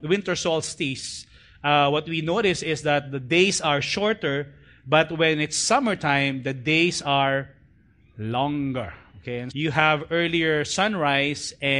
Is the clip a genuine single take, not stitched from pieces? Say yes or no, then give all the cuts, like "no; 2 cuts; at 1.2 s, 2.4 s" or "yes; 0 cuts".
no; 1 cut; at 9.5 s